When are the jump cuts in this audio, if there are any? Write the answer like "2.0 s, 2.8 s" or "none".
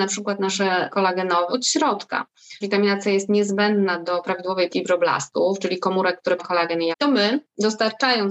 0.9 s, 1.5 s, 2.6 s, 4.7 s, 6.4 s, 6.9 s